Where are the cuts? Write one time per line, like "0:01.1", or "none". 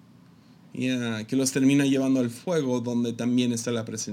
none